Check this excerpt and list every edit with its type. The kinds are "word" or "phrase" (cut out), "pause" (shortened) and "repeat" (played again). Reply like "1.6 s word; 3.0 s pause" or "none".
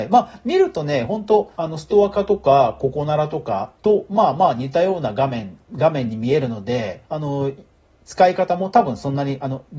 1.5 s pause; 3.8 s pause; 5.7 s word; 7.0 s pause